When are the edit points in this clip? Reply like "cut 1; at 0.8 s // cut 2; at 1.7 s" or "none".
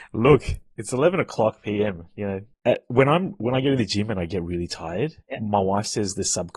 cut 1; at 2.5 s // cut 2; at 5.2 s